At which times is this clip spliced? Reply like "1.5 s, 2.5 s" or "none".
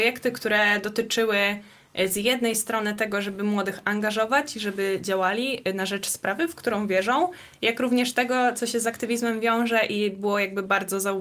none